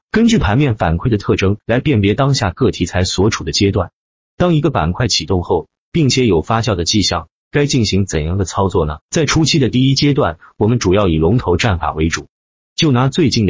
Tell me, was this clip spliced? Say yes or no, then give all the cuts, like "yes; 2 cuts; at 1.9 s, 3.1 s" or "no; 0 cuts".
yes; 2 cuts; at 1.6 s, 9.0 s